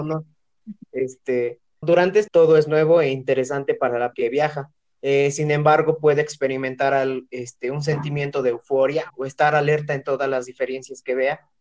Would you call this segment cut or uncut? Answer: cut